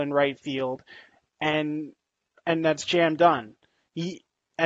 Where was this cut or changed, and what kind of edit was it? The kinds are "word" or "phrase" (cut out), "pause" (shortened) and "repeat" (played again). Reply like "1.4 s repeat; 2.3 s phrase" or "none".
none